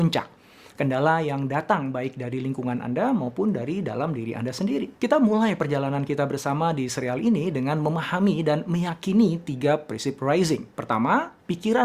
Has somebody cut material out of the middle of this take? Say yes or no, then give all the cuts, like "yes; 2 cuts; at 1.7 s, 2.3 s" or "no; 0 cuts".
yes; 2 cuts; at 5.0 s, 10.7 s